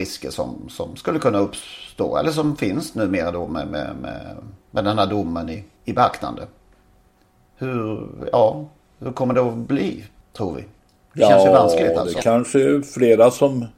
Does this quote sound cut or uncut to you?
uncut